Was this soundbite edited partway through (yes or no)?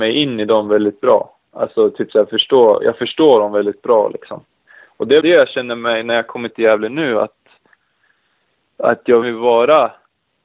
yes